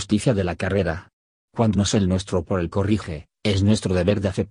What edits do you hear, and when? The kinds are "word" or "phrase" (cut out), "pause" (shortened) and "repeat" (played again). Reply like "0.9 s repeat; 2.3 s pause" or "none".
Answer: 1.7 s word; 2.7 s word